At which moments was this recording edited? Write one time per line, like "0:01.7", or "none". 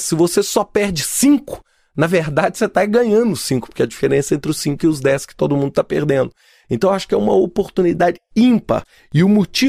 none